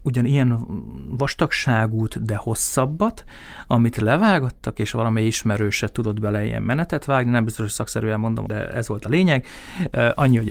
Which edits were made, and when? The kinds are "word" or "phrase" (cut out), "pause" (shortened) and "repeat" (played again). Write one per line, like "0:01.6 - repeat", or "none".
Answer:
0:08.4 - phrase